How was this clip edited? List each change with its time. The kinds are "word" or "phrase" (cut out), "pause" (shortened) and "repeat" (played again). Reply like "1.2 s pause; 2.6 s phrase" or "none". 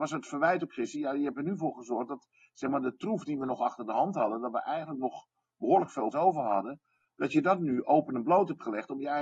6.1 s word